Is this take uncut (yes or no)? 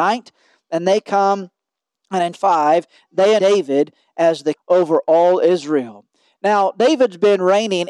no